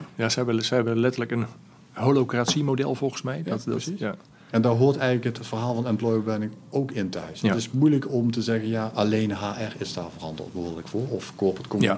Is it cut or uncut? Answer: uncut